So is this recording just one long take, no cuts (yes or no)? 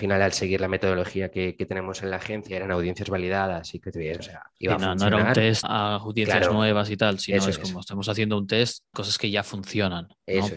no